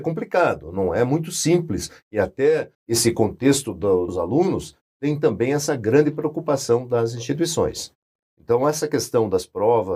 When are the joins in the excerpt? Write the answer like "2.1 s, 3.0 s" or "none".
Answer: 2.7 s, 4.1 s